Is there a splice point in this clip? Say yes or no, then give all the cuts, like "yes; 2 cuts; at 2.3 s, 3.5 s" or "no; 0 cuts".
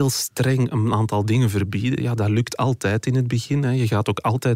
no; 0 cuts